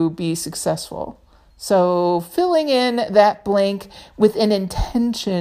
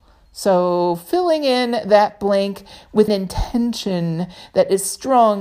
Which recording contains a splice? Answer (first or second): second